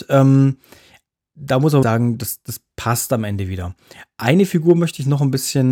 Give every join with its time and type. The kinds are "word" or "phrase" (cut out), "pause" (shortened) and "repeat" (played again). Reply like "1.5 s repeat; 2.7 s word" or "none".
1.8 s word